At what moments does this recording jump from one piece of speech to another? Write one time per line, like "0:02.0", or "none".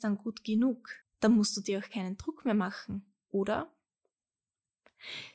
0:01.0